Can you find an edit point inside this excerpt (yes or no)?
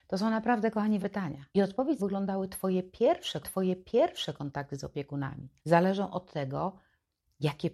yes